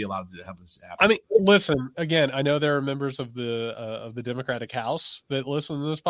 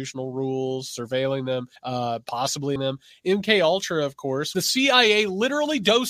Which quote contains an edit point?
second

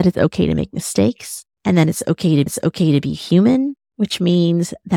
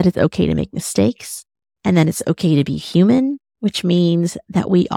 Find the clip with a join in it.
first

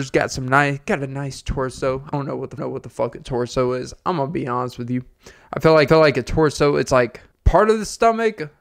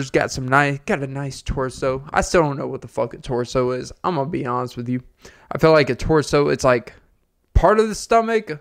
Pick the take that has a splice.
first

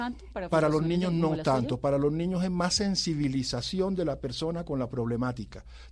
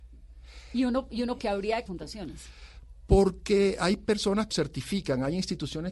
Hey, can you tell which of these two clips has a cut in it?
second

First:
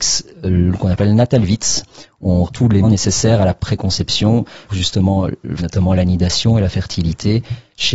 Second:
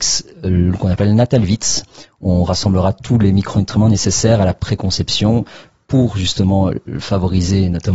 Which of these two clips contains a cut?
first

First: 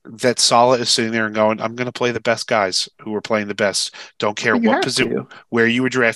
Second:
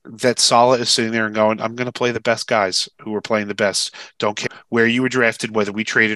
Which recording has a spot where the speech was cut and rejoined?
second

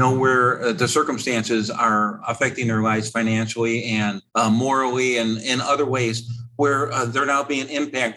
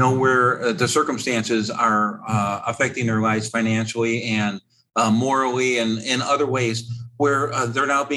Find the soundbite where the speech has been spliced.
first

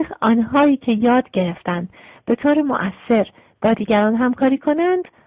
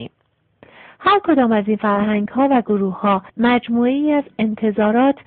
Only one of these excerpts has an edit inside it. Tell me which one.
second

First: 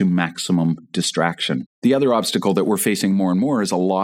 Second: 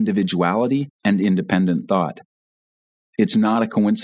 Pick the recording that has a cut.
first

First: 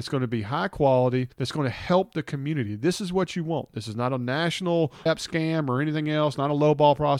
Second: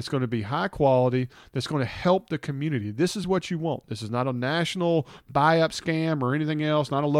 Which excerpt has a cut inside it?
first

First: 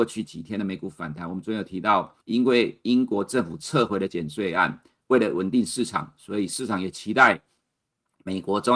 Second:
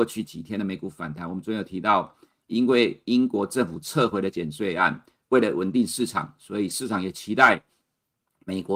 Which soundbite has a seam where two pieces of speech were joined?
first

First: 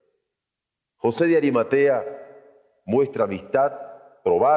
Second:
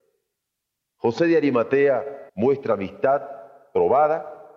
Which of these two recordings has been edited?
second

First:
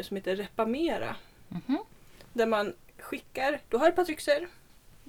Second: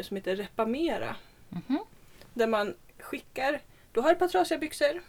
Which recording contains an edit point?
first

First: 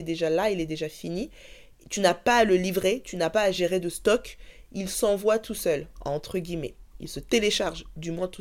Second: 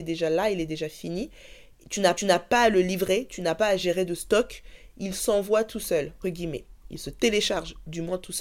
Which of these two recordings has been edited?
second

